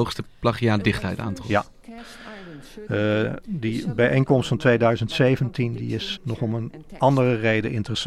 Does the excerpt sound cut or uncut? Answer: cut